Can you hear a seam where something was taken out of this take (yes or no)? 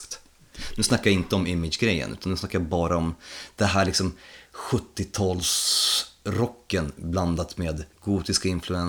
yes